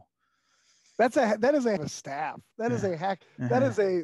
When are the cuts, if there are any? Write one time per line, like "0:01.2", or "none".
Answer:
0:01.8